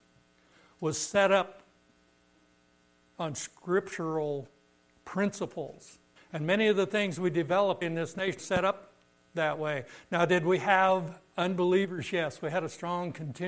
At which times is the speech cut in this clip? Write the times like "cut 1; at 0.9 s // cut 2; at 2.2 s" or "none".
cut 1; at 6.2 s // cut 2; at 7.8 s // cut 3; at 8.4 s